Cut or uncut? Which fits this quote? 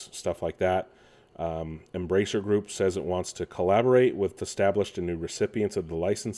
cut